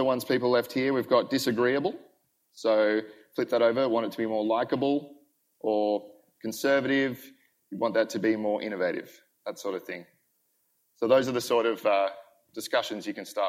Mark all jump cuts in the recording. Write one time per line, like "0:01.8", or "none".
none